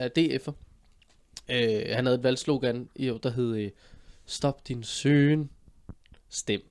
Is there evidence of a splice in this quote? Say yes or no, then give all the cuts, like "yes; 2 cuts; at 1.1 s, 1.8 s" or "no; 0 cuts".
no; 0 cuts